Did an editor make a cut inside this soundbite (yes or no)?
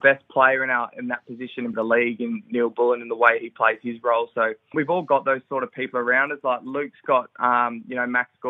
yes